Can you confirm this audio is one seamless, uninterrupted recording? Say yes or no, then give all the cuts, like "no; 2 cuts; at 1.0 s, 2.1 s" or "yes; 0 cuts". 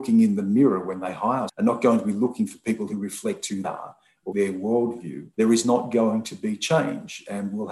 no; 4 cuts; at 1.5 s, 3.6 s, 4.3 s, 5.3 s